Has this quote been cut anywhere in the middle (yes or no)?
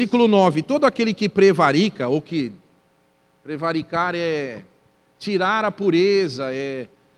no